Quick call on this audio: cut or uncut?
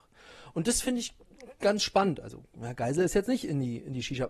uncut